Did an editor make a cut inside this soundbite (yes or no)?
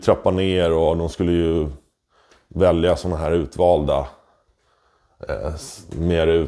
no